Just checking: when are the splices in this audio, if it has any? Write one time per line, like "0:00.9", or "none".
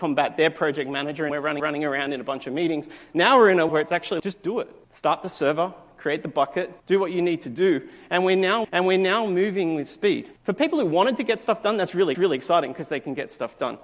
0:01.3
0:01.6
0:03.7
0:04.2
0:04.8
0:06.8
0:08.6
0:10.4
0:12.1